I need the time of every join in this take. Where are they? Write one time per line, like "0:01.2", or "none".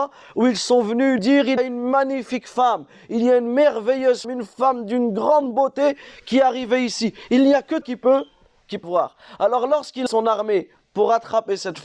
0:01.2
0:01.6
0:04.2
0:07.8
0:08.8
0:10.1